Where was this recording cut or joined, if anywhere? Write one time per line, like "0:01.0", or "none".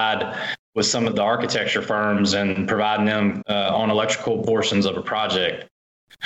0:01.1
0:03.4